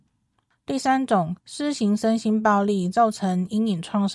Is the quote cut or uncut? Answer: cut